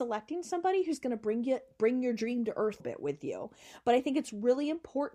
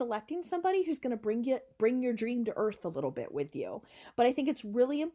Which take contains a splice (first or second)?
first